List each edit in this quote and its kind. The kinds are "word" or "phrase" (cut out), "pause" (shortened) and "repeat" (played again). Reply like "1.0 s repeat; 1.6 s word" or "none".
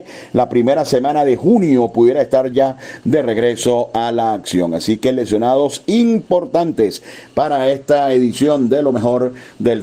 none